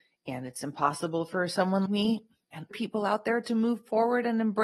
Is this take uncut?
no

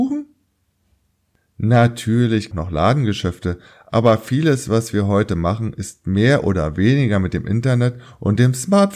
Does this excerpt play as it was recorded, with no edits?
no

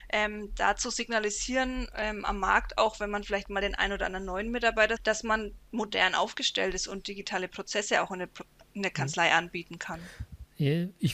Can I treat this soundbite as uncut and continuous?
no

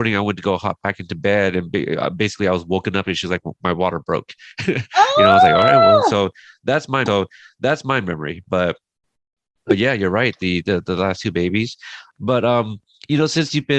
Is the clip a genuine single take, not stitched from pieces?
no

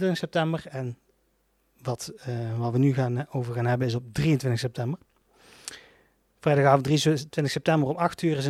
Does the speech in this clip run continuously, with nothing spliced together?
yes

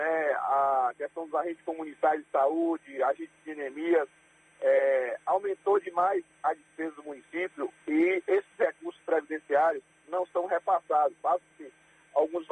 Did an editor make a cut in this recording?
no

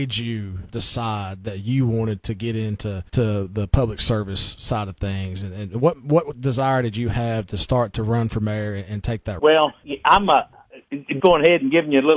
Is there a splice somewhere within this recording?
yes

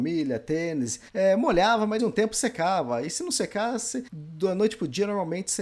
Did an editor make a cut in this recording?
yes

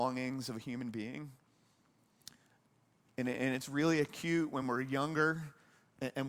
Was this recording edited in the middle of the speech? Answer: no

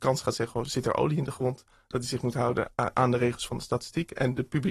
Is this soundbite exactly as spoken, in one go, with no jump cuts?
yes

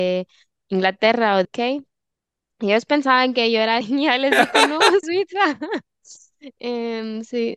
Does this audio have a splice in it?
yes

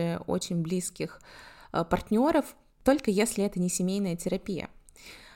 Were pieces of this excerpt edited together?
no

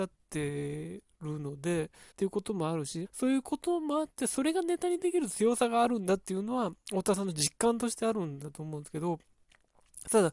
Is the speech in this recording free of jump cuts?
no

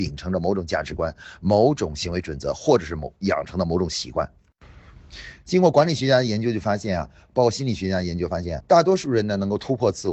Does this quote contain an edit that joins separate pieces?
yes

